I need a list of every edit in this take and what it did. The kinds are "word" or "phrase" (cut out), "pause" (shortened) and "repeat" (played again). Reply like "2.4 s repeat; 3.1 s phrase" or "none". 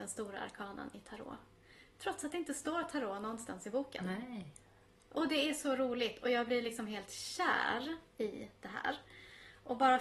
none